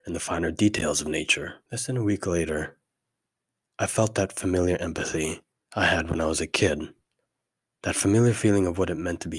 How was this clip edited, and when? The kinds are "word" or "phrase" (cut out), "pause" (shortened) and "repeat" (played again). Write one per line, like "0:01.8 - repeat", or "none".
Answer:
0:01.7 - pause
0:05.5 - pause